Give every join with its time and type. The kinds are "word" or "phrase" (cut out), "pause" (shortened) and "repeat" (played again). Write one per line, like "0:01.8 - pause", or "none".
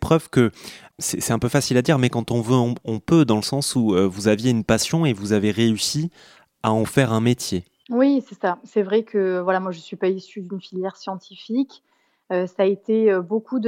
none